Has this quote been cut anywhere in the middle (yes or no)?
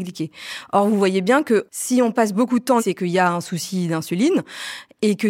yes